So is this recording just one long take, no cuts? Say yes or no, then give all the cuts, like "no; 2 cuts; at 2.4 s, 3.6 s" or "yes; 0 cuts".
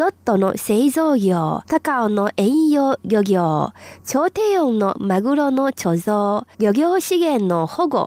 no; 2 cuts; at 1.6 s, 6.5 s